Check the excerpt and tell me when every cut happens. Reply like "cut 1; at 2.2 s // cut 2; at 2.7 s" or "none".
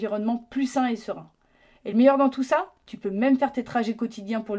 none